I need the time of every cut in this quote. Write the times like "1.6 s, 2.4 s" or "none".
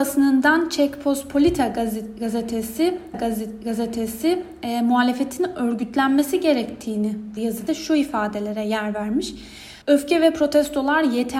3.1 s, 7.4 s, 7.7 s, 9.8 s